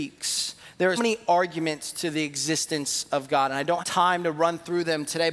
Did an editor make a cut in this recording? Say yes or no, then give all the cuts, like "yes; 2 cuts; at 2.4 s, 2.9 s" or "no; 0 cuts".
yes; 2 cuts; at 1.0 s, 3.8 s